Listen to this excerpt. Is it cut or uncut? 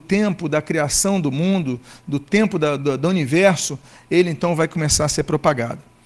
uncut